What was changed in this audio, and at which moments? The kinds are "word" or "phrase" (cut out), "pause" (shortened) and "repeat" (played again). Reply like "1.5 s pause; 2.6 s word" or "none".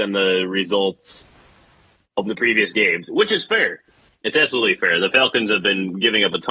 none